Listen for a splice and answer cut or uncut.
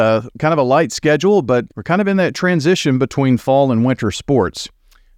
cut